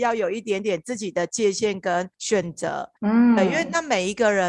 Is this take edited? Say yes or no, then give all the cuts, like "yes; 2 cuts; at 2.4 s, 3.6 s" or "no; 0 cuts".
yes; 2 cuts; at 2.1 s, 3.0 s